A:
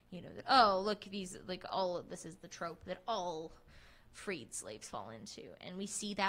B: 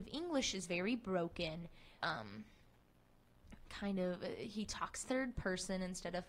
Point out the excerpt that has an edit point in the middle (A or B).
B